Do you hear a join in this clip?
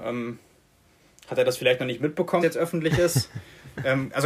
yes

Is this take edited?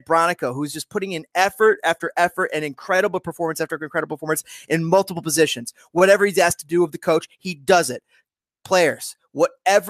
no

